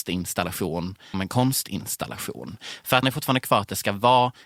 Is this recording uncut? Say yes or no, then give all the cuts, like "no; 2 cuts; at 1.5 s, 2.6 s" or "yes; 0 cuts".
no; 2 cuts; at 1.1 s, 3.0 s